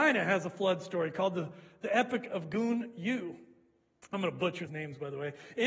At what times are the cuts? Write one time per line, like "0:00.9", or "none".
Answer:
0:04.7